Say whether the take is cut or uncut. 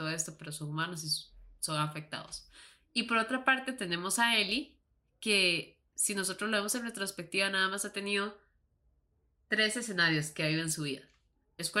uncut